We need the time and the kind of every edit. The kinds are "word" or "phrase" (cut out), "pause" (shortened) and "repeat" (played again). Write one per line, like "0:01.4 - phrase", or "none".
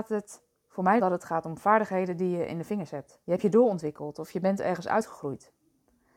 0:01.0 - word
0:03.2 - pause